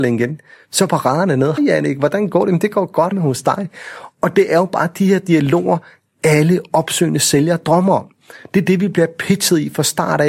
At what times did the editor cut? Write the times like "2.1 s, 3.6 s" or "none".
1.6 s, 3.1 s